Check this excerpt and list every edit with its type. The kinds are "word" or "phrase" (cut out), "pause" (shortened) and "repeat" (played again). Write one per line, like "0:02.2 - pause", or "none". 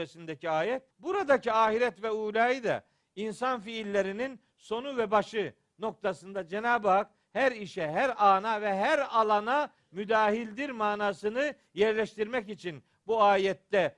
0:00.9 - pause